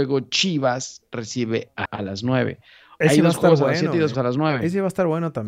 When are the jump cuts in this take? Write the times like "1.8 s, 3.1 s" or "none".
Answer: 1.9 s, 3.0 s, 4.1 s